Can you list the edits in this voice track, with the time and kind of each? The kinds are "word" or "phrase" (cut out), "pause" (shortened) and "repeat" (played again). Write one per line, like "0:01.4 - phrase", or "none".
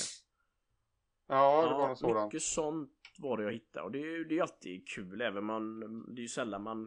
none